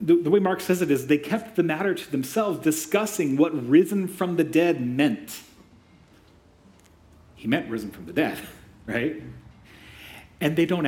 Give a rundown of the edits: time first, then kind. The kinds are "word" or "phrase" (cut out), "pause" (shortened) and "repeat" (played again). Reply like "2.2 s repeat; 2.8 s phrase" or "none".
none